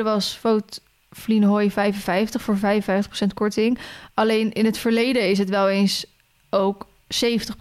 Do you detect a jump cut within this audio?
no; 0 cuts

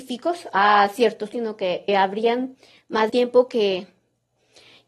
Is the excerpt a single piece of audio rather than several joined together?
no; 3 cuts; at 1.3 s, 1.9 s, 3.1 s

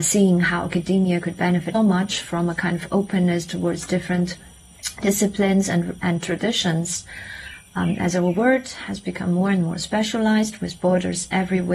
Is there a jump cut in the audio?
yes; 2 cuts; at 1.7 s, 6.0 s

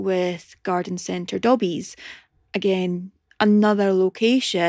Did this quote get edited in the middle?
no; 0 cuts

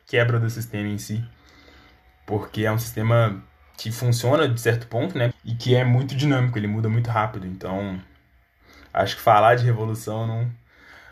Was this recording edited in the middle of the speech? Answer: yes; 1 cut; at 5.3 s

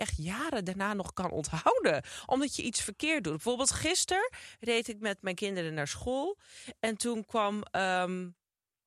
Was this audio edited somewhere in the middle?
no; 0 cuts

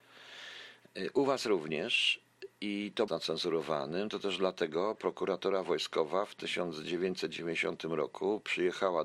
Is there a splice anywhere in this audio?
yes; 1 cut; at 3.1 s

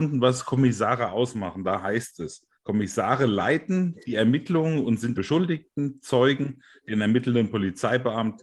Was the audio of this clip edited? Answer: yes; 2 cuts; at 2.5 s, 5.1 s

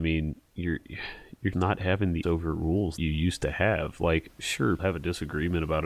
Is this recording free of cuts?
no; 4 cuts; at 1.5 s, 2.2 s, 3.0 s, 4.8 s

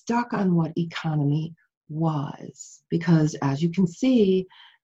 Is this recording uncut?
no; 1 cut; at 2.9 s

